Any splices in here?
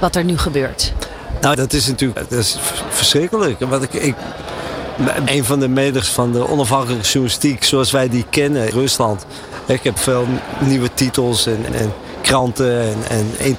yes; 8 cuts; at 1.5 s, 2.2 s, 3.9 s, 5.3 s, 6.0 s, 8.7 s, 10.0 s, 11.7 s

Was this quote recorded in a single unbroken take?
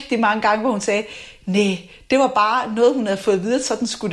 yes; 0 cuts

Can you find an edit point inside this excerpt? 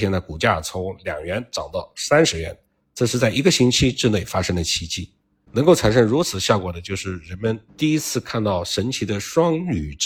no; 0 cuts

